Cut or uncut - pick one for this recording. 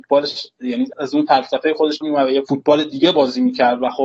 cut